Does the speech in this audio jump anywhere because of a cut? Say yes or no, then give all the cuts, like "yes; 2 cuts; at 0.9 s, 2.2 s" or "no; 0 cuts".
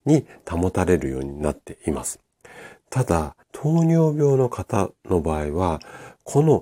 yes; 1 cut; at 3.4 s